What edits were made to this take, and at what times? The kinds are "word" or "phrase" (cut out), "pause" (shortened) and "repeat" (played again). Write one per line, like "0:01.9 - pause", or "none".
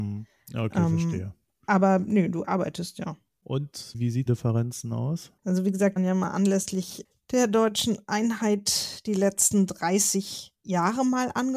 0:04.3 - phrase
0:05.4 - pause
0:06.0 - phrase